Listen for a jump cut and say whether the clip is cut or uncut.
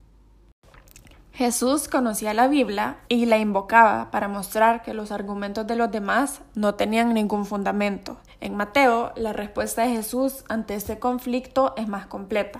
cut